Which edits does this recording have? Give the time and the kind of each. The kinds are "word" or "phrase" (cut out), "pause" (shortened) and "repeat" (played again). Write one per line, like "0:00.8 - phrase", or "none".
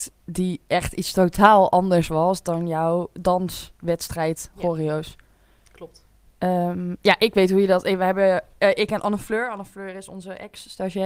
none